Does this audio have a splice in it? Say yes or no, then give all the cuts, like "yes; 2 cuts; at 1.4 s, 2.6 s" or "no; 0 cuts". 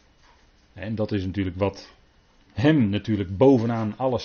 yes; 1 cut; at 2.1 s